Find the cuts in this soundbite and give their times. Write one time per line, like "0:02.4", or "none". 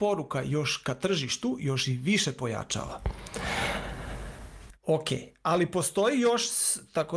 none